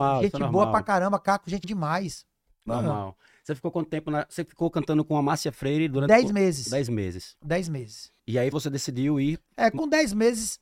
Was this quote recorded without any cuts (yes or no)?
no